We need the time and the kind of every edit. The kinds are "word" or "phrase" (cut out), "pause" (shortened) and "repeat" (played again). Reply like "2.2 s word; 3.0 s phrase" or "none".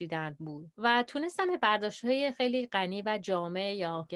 none